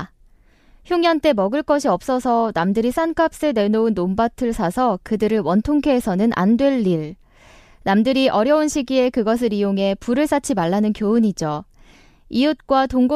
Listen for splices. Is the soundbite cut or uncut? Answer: uncut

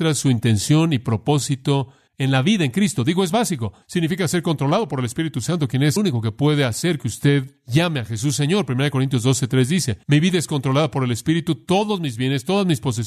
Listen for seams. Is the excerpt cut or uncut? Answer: cut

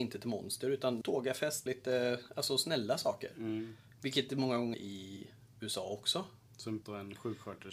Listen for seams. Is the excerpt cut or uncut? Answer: cut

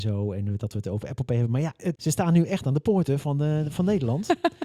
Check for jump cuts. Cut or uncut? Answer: cut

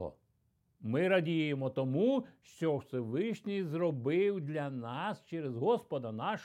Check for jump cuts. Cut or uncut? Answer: uncut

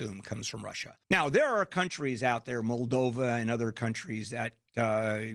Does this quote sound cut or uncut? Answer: cut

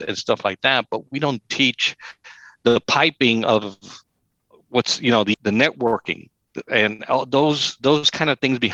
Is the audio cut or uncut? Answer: cut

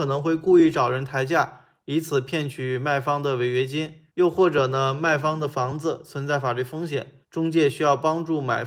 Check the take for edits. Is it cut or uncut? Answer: cut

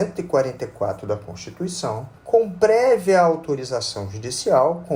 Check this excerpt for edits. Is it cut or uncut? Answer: cut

